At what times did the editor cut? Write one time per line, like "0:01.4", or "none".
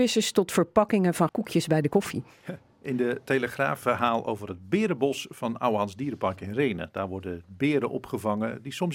0:01.3
0:03.8